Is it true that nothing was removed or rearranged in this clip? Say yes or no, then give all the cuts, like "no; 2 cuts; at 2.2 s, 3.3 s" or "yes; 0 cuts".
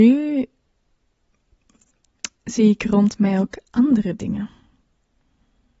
no; 1 cut; at 2.4 s